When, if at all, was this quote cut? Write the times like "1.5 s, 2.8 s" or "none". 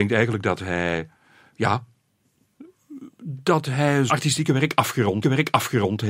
3.2 s, 4.1 s, 5.2 s